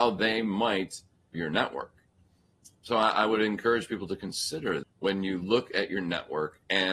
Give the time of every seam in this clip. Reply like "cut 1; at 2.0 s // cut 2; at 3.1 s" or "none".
cut 1; at 1.3 s // cut 2; at 2.7 s // cut 3; at 4.8 s